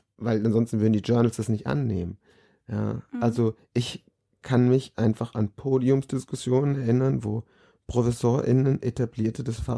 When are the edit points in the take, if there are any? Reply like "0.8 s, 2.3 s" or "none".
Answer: none